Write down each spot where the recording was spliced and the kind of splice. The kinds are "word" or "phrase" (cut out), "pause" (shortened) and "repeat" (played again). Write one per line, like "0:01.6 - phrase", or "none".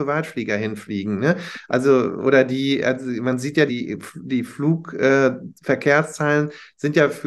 0:03.7 - word